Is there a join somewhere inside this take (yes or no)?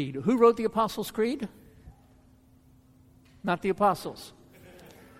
no